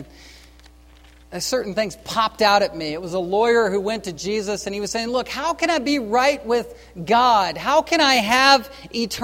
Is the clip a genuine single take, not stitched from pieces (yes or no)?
yes